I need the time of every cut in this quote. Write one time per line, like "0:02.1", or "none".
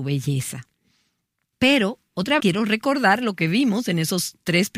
0:02.4